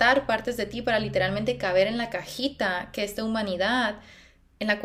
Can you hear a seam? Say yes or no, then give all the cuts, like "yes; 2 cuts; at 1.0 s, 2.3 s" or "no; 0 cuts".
no; 0 cuts